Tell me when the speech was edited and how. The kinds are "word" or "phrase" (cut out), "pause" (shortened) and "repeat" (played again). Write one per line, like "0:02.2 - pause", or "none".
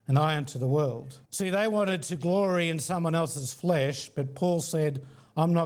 0:01.3 - pause